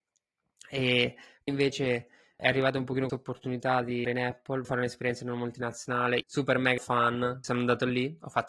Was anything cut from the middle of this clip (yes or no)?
yes